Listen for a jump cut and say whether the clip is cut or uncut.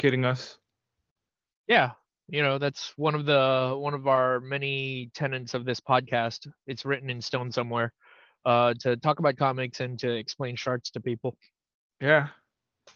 uncut